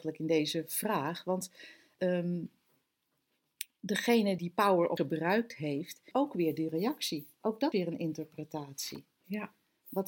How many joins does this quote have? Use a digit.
5